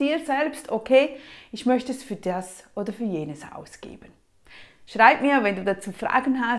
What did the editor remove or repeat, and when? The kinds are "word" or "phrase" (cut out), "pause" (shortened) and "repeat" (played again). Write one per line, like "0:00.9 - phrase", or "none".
none